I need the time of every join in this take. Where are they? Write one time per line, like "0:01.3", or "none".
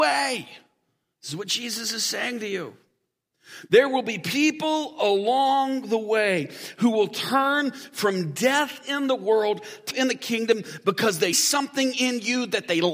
0:09.9
0:11.3